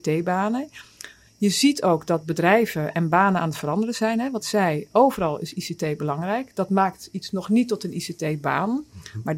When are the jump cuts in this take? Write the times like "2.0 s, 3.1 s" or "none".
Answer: 4.4 s